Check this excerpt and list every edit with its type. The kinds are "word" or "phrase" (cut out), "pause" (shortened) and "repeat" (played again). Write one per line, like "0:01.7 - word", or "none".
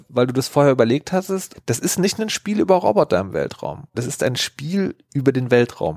0:01.5 - word
0:03.9 - word